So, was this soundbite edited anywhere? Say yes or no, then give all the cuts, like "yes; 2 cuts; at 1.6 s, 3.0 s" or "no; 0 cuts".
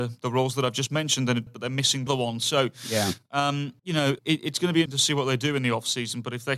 yes; 5 cuts; at 1.5 s, 2.1 s, 3.8 s, 4.2 s, 4.9 s